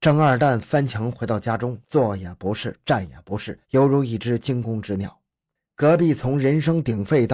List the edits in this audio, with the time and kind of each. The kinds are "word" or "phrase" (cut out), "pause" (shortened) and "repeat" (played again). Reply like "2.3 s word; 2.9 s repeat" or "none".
3.6 s pause

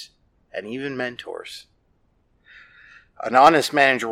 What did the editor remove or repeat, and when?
none

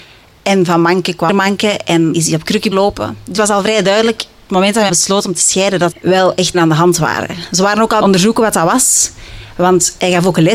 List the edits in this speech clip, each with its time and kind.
1.3 s word; 2.1 s word; 2.7 s word; 3.4 s word; 4.5 s word; 4.9 s word; 5.9 s word; 6.5 s word; 8.0 s word

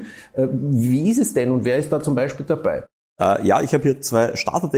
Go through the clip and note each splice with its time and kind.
none

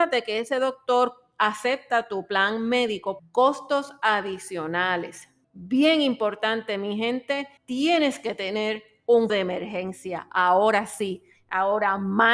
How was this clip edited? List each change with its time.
3.2 s phrase; 5.4 s pause; 7.6 s pause; 9.3 s word

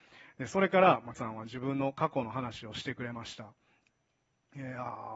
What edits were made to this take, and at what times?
1.1 s word

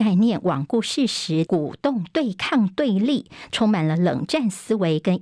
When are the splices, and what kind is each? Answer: 1.5 s phrase

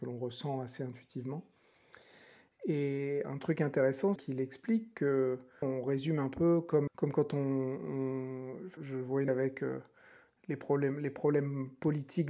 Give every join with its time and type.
4.2 s word; 5.6 s word; 6.9 s word; 8.8 s word; 9.3 s word

